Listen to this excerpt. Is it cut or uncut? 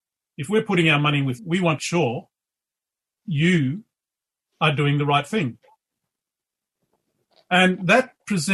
cut